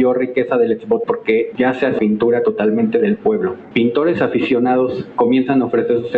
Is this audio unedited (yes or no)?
no